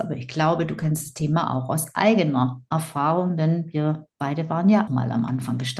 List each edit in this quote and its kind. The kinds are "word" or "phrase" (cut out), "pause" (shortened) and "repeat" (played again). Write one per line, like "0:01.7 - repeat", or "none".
0:04.9 - word